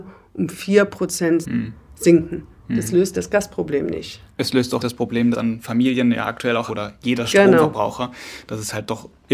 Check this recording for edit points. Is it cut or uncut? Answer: cut